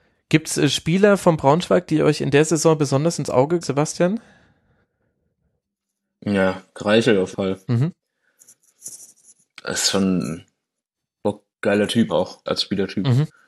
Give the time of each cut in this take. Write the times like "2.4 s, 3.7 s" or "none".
3.6 s, 7.3 s, 12.1 s, 12.5 s